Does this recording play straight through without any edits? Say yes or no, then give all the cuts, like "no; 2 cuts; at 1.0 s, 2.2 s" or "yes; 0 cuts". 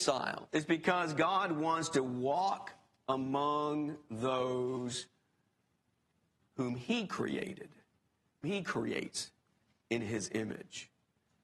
no; 1 cut; at 8.4 s